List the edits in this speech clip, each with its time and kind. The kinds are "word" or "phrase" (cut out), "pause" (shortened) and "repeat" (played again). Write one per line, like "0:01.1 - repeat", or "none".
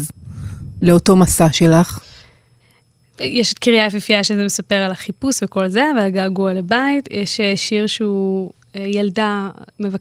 none